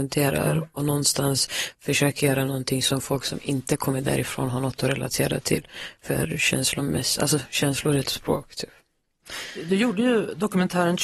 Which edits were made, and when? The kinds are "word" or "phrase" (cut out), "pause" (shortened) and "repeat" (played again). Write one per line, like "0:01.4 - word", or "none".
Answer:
0:08.0 - word